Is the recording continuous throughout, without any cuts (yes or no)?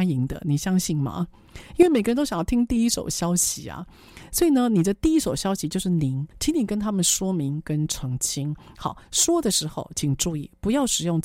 no